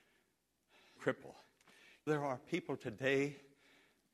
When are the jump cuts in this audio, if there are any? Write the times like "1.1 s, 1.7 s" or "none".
1.0 s, 2.1 s